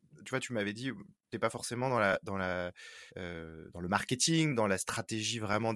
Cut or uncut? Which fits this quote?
cut